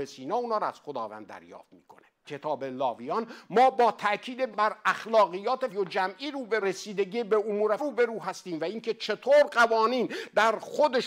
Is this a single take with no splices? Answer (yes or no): no